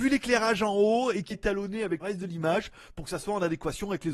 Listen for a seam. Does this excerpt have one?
yes; 2 cuts; at 1.3 s, 2.0 s

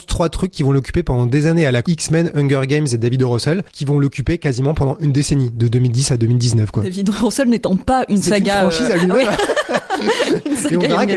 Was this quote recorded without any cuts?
no; 2 cuts; at 1.8 s, 3.7 s

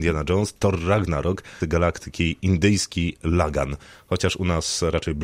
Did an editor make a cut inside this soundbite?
yes; 2 cuts; at 1.6 s, 2.4 s

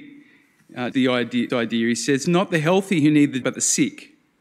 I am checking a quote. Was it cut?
yes; 4 cuts; at 0.9 s, 1.5 s, 2.2 s, 3.4 s

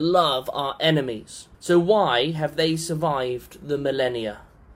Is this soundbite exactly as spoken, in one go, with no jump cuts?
no; 1 cut; at 1.5 s

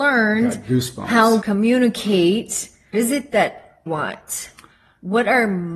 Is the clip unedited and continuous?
no; 3 cuts; at 1.4 s, 2.9 s, 3.9 s

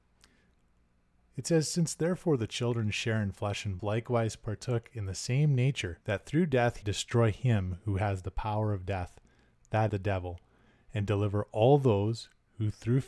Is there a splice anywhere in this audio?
yes; 4 cuts; at 3.8 s, 6.0 s, 6.8 s, 9.9 s

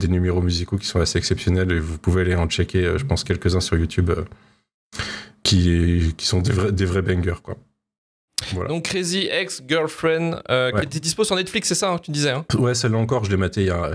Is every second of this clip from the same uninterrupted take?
yes; 0 cuts

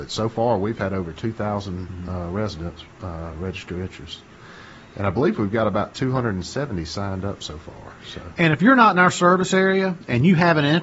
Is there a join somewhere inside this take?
no; 0 cuts

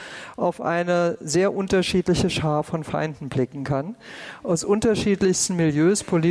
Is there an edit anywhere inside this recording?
no; 0 cuts

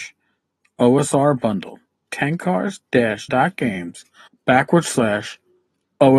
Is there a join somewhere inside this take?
yes; 3 cuts; at 2.1 s, 3.3 s, 4.3 s

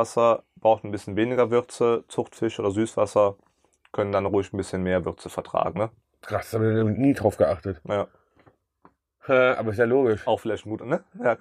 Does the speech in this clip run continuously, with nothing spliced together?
yes; 0 cuts

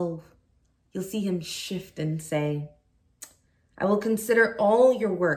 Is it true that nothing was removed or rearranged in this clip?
yes; 0 cuts

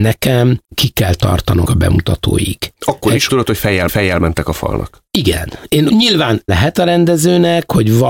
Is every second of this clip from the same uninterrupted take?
no; 6 cuts; at 1.6 s, 3.3 s, 3.9 s, 5.1 s, 5.9 s, 6.5 s

